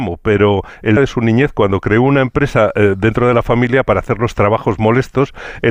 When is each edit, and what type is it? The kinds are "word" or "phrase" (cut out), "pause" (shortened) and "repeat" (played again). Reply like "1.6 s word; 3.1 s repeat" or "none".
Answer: 1.0 s phrase